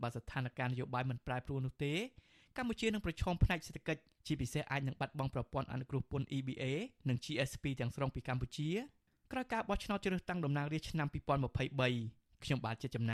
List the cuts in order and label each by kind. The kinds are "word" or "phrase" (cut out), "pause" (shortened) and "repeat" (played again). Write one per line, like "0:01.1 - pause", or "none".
none